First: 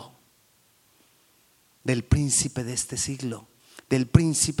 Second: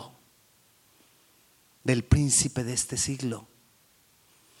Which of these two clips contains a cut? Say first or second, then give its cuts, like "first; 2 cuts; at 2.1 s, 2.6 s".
first; 1 cut; at 3.6 s